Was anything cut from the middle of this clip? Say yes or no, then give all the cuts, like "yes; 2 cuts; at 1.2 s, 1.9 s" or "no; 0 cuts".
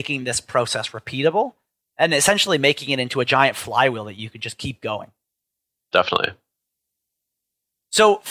no; 0 cuts